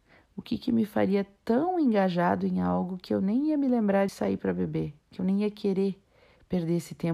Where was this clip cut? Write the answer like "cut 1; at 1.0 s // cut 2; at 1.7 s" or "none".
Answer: cut 1; at 4.1 s